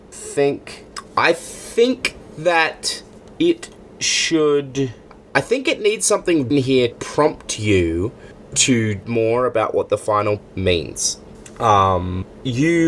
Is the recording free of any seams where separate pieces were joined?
no; 4 cuts; at 6.5 s, 6.9 s, 9.0 s, 10.4 s

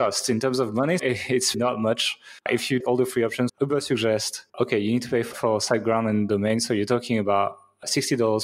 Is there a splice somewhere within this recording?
yes; 7 cuts; at 1.0 s, 1.5 s, 2.4 s, 2.8 s, 3.5 s, 4.5 s, 5.3 s

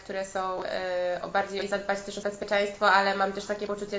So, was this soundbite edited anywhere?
yes; 2 cuts; at 1.6 s, 2.2 s

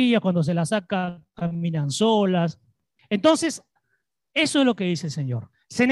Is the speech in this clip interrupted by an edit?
no; 0 cuts

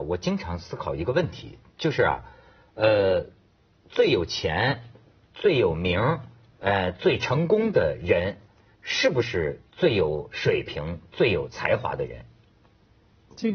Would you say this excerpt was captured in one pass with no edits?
yes; 0 cuts

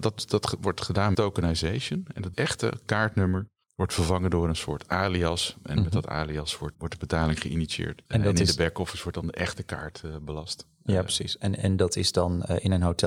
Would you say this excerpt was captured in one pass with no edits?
no; 5 cuts; at 1.1 s, 2.3 s, 3.6 s, 6.7 s, 8.1 s

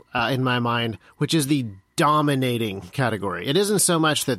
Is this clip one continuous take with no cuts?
yes; 0 cuts

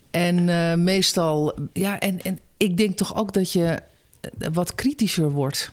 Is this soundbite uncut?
no; 1 cut; at 1.7 s

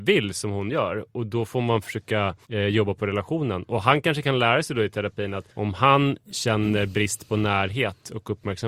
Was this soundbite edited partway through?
yes; 2 cuts; at 2.4 s, 5.5 s

